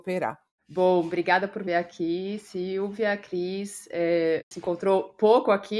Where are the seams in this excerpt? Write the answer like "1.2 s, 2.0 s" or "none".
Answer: 1.7 s, 4.5 s